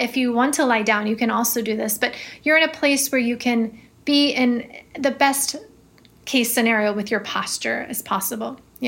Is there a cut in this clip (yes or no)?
no